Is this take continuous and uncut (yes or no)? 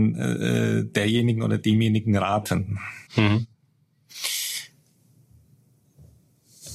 no